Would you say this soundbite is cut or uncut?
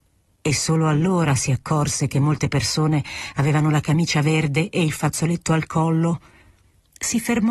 uncut